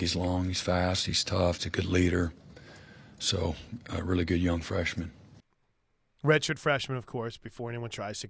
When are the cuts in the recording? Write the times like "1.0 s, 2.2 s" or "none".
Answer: 1.5 s